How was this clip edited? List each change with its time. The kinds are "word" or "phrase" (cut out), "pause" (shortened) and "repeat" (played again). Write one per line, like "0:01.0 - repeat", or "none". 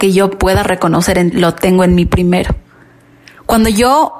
0:01.3 - word